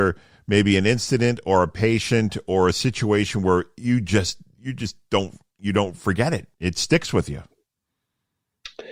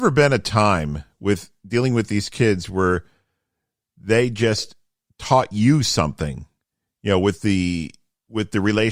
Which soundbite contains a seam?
first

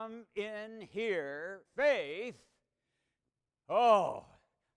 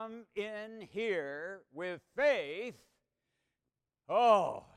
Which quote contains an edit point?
first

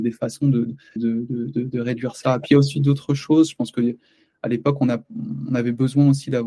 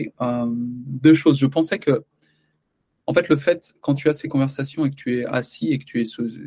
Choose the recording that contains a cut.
first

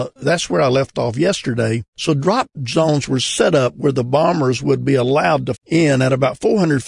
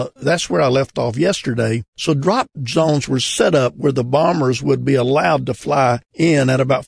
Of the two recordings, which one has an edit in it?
first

